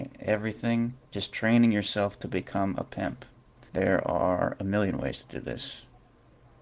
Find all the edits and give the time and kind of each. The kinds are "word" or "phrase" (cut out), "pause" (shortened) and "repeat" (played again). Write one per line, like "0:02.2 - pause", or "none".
0:01.1 - pause
0:03.7 - pause